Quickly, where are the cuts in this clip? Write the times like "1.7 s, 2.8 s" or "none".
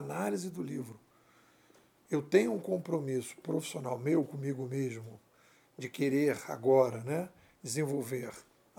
none